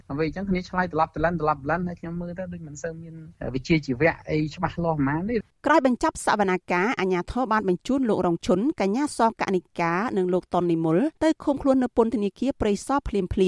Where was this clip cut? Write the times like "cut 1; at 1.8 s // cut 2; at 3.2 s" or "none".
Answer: cut 1; at 11.2 s